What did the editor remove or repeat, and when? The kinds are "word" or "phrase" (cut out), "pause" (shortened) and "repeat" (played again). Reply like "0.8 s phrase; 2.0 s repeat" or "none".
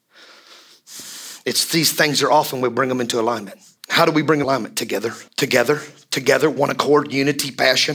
3.8 s pause; 4.4 s word; 5.3 s pause